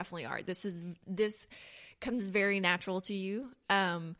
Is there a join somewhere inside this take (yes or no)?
no